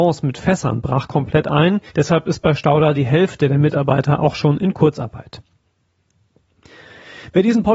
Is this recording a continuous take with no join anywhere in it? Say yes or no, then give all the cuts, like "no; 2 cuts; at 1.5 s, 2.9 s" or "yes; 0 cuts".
no; 1 cut; at 1.9 s